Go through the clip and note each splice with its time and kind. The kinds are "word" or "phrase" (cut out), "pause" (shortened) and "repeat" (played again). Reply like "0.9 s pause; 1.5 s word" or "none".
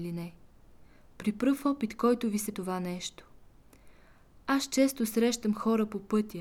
2.5 s phrase